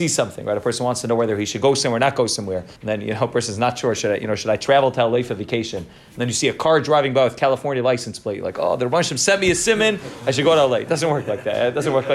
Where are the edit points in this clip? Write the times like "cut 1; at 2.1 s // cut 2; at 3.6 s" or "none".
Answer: cut 1; at 2.8 s